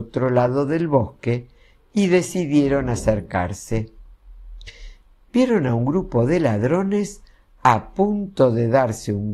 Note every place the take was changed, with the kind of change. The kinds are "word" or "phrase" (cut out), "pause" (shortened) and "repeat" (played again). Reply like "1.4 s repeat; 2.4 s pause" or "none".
none